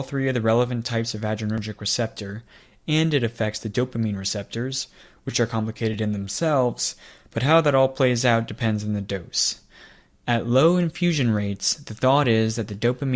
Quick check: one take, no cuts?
yes; 0 cuts

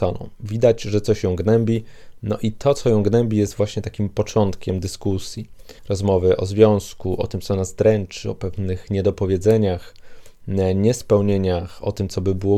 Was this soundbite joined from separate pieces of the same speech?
yes; 1 cut; at 5.8 s

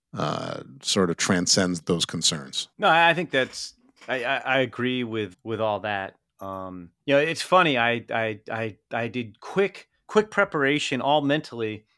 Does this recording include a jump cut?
yes; 4 cuts; at 1.8 s, 2.7 s, 5.3 s, 7.0 s

